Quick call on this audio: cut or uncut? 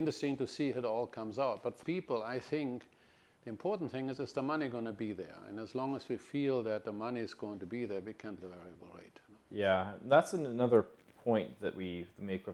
cut